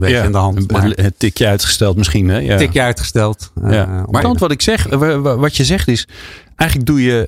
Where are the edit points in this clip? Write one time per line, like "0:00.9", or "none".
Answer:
0:04.2

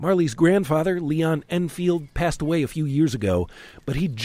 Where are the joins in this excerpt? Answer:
none

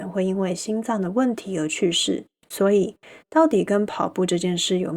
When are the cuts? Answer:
0:02.3

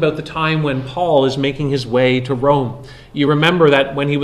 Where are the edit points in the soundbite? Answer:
none

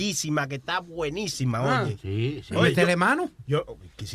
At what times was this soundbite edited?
none

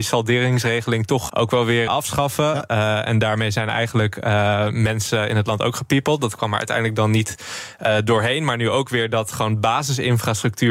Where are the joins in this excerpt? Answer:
0:01.3
0:01.9

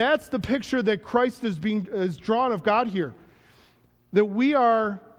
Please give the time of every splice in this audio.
none

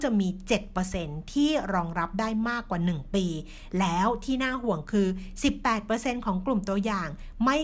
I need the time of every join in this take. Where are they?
none

